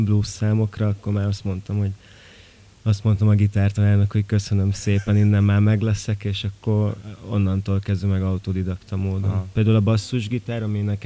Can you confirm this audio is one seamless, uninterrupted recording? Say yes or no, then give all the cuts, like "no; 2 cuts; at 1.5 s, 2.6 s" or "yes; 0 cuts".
yes; 0 cuts